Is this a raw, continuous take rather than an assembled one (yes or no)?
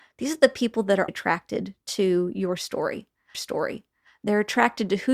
no